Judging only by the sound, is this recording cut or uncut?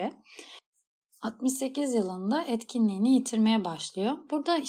uncut